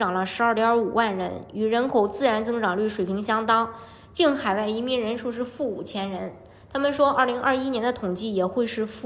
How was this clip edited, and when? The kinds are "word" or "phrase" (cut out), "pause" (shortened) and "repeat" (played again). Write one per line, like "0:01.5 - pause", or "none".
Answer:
none